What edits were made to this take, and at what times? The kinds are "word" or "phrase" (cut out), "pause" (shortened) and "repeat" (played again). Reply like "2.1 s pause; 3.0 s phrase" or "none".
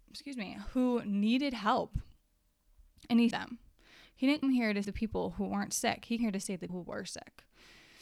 3.3 s word; 4.4 s word; 4.8 s word; 6.2 s word; 6.7 s word